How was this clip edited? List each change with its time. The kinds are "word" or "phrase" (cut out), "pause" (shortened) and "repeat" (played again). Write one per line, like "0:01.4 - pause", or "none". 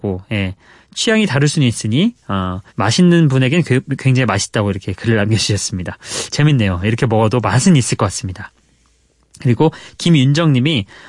0:02.7 - pause